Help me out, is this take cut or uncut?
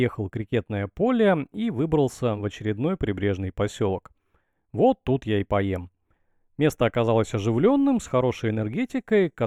uncut